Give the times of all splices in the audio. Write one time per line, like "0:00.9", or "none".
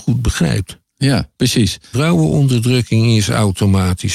0:01.9